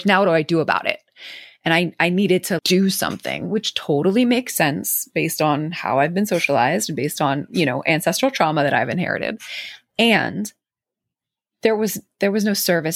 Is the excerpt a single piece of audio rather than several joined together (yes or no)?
no